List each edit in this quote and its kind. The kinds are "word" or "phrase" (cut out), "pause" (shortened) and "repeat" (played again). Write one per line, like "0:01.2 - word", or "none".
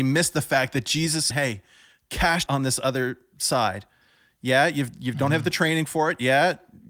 0:01.3 - phrase
0:02.5 - phrase